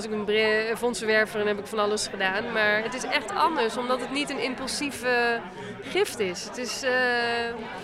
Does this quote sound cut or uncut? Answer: uncut